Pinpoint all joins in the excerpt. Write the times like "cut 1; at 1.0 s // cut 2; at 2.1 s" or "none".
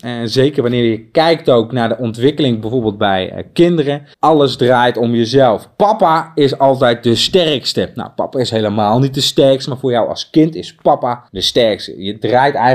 cut 1; at 4.1 s // cut 2; at 11.3 s